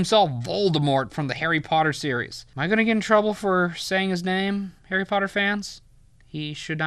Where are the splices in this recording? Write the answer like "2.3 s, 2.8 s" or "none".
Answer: 4.8 s